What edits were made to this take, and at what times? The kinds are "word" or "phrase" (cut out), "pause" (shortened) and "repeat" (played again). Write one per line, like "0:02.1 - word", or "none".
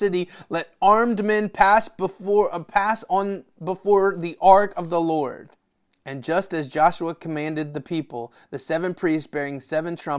0:05.9 - pause